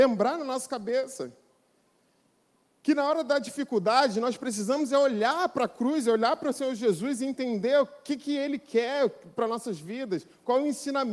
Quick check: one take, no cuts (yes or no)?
yes